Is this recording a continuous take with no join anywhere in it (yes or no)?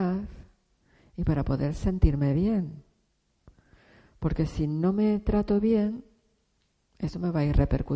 yes